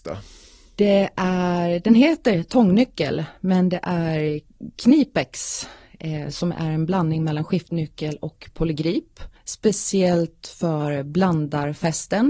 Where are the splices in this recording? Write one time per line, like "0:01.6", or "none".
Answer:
0:09.4